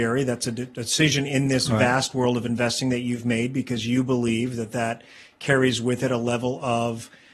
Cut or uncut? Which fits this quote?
uncut